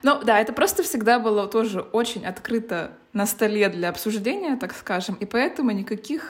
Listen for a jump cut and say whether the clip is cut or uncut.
uncut